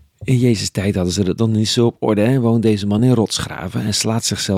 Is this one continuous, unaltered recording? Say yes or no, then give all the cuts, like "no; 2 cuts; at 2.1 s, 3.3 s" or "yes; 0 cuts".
yes; 0 cuts